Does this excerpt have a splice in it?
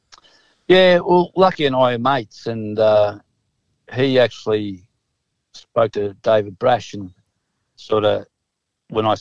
no; 0 cuts

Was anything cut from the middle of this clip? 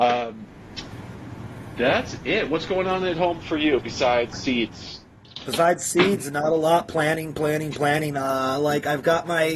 no; 0 cuts

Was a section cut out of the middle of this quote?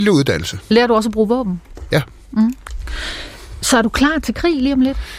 no; 0 cuts

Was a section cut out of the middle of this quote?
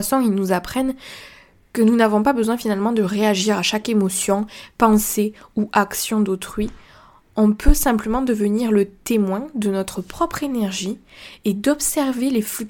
no; 0 cuts

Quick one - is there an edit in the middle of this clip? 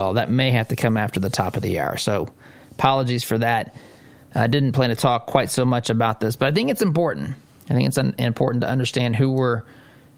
no; 0 cuts

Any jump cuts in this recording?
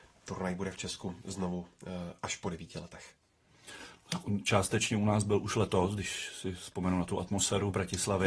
no; 0 cuts

